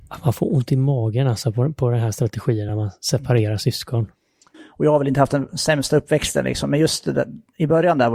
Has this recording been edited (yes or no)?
no